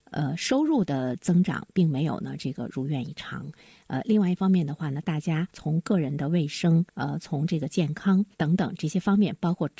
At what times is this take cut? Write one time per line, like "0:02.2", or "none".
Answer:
0:05.5
0:06.9
0:08.3